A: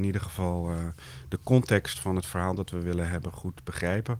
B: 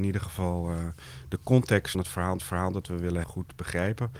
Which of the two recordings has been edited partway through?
B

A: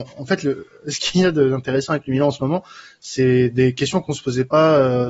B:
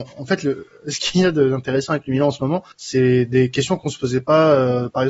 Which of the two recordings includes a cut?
B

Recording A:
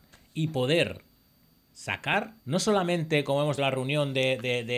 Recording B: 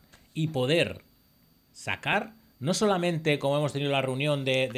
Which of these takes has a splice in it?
A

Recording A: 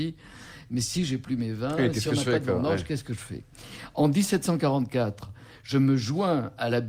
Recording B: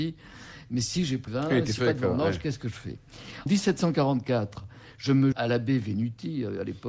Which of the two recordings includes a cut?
B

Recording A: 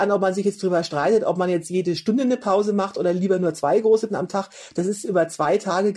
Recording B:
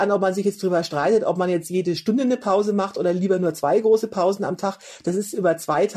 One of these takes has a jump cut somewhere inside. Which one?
A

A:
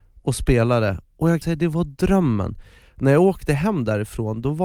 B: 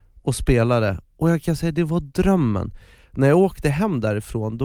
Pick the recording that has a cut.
A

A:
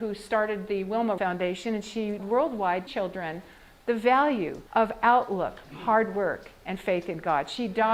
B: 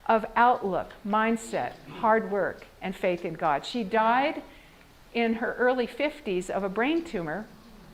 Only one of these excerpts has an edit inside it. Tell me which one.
A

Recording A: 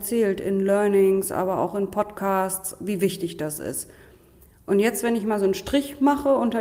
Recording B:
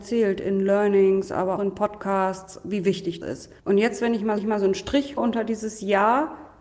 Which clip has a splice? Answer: B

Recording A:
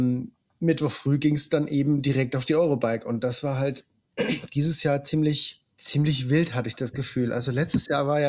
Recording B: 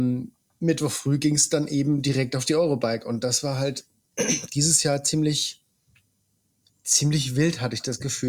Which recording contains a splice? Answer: A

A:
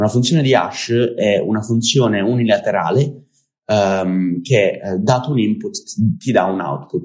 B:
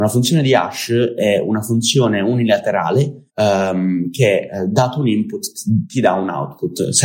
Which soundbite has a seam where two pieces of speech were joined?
B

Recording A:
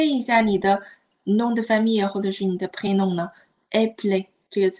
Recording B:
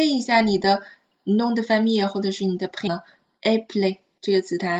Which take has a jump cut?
B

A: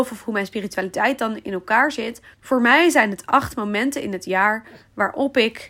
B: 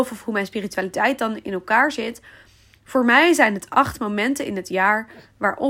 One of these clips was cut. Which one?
A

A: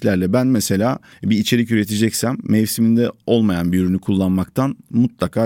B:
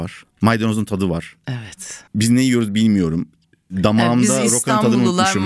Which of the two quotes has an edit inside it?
B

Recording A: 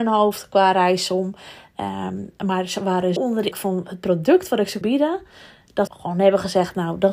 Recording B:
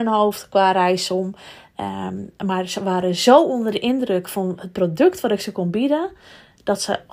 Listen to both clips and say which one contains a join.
A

